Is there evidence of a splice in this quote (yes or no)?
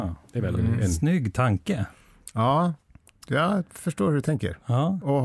no